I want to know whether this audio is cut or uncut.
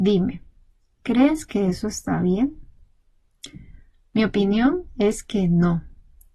uncut